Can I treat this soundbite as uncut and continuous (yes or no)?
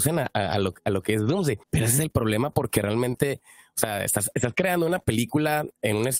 no